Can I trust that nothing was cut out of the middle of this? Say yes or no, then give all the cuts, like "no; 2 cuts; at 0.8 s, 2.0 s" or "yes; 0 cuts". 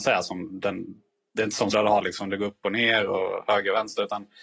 no; 1 cut; at 1.7 s